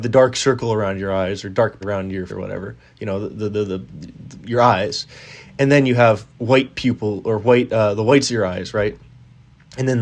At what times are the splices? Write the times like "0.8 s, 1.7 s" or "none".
1.8 s, 2.3 s, 6.3 s